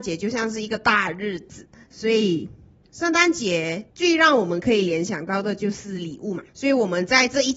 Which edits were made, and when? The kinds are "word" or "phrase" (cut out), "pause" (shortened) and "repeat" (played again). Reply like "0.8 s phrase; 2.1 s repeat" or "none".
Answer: 3.9 s pause; 6.5 s pause